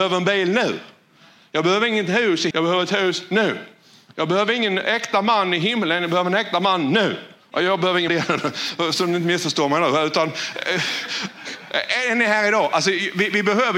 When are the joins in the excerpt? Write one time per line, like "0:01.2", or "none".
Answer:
0:02.5
0:08.1